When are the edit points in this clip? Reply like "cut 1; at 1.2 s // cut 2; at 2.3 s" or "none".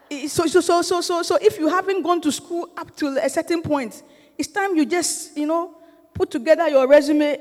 none